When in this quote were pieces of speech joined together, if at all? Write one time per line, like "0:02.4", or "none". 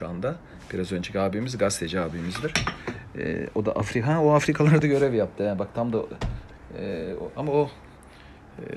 none